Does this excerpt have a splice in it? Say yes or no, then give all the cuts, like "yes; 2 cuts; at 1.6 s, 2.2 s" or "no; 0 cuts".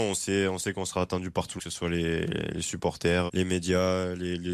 yes; 2 cuts; at 1.6 s, 3.3 s